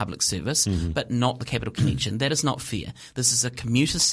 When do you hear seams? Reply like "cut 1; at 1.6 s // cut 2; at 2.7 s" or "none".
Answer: none